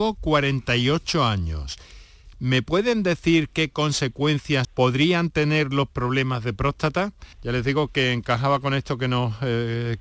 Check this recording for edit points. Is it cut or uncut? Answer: cut